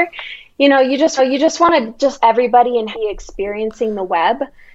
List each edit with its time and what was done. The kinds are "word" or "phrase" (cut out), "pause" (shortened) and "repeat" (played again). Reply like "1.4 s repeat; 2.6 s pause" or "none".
1.2 s repeat; 2.2 s phrase; 2.9 s phrase